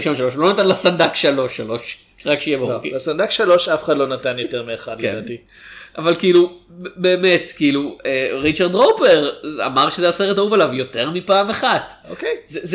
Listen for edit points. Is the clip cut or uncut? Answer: uncut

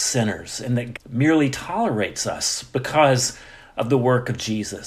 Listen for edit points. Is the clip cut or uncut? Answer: cut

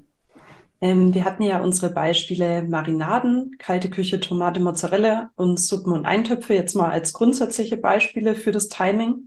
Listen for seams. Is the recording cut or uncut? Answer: uncut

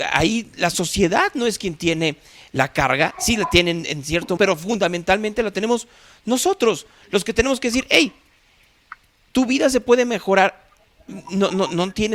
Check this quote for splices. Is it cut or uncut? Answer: cut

